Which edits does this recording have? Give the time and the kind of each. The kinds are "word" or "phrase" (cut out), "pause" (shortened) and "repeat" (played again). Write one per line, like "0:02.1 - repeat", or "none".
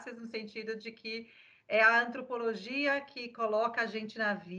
none